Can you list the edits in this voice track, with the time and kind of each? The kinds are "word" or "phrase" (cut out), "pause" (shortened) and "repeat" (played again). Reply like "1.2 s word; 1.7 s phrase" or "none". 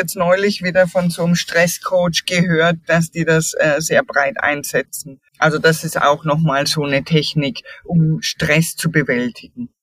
5.3 s pause